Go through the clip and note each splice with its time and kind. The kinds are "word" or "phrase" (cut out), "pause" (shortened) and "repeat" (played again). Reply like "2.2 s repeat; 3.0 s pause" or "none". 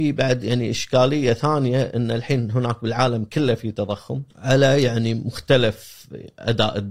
4.3 s pause